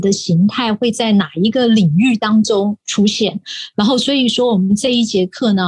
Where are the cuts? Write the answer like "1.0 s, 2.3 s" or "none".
2.8 s